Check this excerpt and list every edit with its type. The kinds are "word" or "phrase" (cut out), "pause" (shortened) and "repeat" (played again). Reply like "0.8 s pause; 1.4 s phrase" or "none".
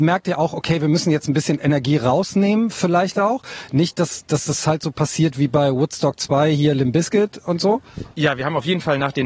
none